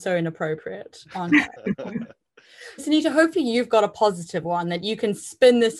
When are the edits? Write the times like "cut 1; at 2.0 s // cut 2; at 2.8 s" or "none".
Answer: cut 1; at 2.8 s